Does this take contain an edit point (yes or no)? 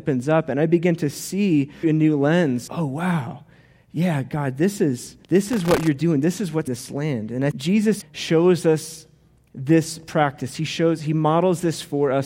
yes